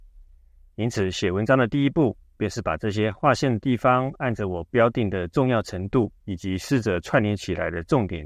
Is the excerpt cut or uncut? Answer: cut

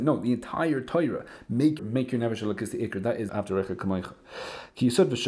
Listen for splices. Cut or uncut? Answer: cut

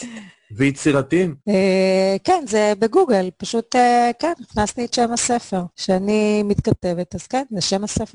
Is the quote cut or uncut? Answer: cut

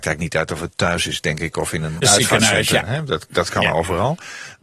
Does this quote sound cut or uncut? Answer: cut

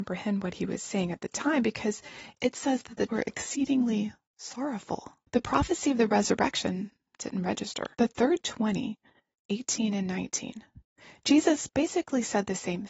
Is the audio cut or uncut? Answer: cut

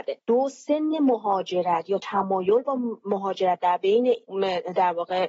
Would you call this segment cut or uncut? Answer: uncut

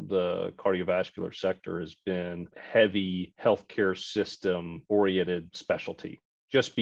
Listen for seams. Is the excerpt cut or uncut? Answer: cut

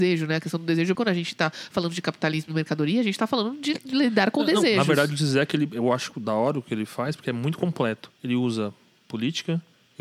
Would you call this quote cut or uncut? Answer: cut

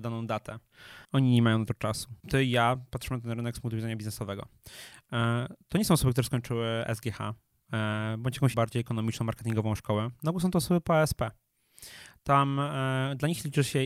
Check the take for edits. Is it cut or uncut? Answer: cut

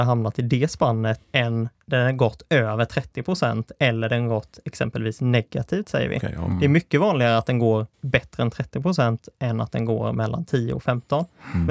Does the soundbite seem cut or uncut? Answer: cut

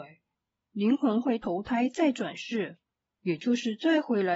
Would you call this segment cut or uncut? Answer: uncut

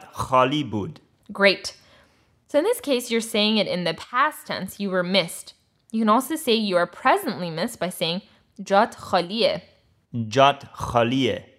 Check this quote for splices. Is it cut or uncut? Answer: uncut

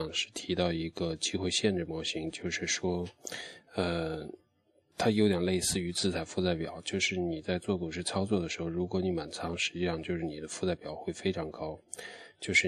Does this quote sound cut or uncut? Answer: uncut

